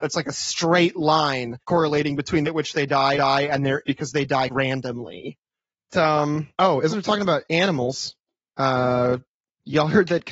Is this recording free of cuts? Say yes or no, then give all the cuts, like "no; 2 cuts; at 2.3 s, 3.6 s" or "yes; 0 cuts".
no; 9 cuts; at 1.6 s, 2.4 s, 3.2 s, 3.8 s, 4.5 s, 5.9 s, 6.5 s, 6.9 s, 7.4 s